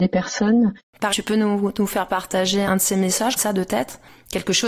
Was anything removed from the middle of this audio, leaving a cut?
yes; 3 cuts; at 1.1 s, 2.6 s, 3.4 s

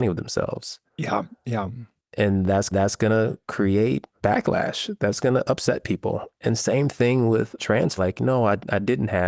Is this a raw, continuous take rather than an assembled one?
no; 4 cuts; at 2.7 s, 4.1 s, 7.6 s, 8.0 s

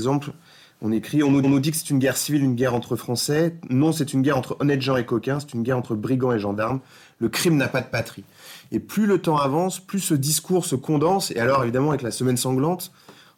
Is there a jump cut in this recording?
yes; 1 cut; at 1.4 s

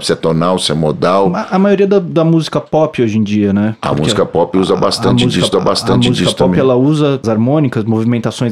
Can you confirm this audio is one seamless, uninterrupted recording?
no; 2 cuts; at 5.5 s, 7.2 s

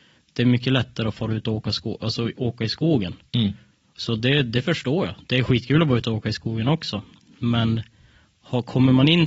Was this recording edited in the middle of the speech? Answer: no; 0 cuts

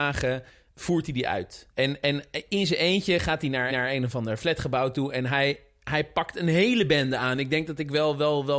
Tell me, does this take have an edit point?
yes; 2 cuts; at 1.7 s, 3.7 s

